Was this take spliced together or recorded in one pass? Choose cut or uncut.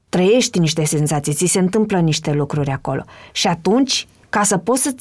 uncut